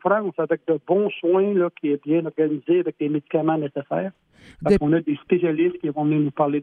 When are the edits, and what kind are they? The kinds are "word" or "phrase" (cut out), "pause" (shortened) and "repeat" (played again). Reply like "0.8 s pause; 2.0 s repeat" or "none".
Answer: none